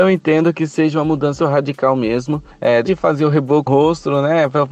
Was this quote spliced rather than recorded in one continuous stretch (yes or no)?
yes